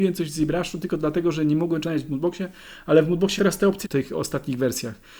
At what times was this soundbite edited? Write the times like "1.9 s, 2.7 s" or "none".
1.8 s, 3.4 s, 3.8 s

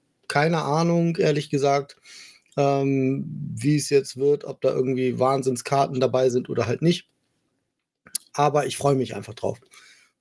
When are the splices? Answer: none

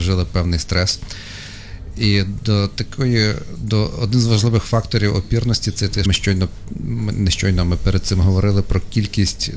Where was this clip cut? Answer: 6.1 s

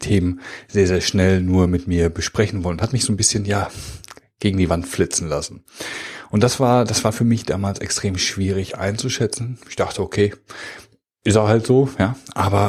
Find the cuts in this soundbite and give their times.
none

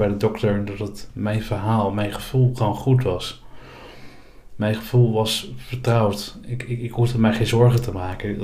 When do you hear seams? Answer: none

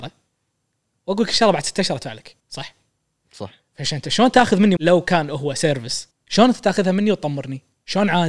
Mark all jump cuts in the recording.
2.4 s, 4.8 s, 6.1 s

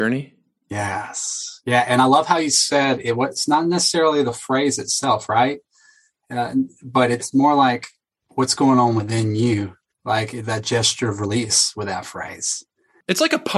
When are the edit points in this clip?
none

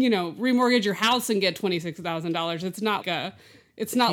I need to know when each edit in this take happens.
3.0 s

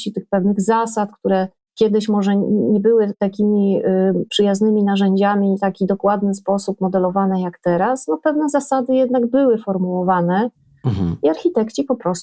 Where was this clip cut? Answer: none

